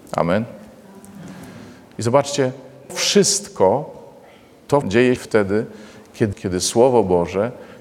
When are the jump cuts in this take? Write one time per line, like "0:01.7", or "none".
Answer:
0:02.9
0:04.8
0:05.2
0:06.3